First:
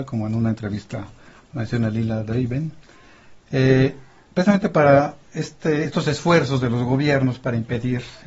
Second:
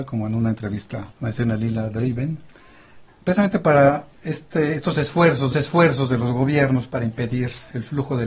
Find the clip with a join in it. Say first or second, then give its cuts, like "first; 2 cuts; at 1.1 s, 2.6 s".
second; 3 cuts; at 1.1 s, 3.1 s, 5.5 s